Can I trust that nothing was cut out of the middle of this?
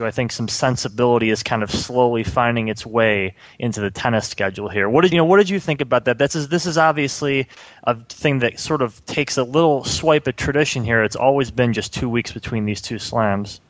no; 1 cut; at 5.1 s

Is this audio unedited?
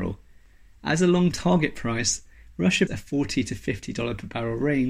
no; 2 cuts; at 1.3 s, 2.9 s

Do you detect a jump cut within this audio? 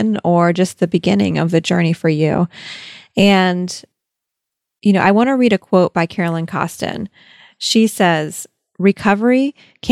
no; 0 cuts

